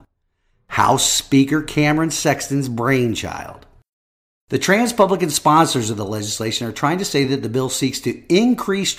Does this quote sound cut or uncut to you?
uncut